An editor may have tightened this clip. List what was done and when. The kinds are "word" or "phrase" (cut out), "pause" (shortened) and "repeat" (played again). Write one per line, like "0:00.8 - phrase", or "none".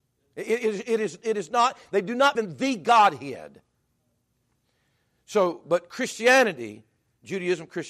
0:02.3 - word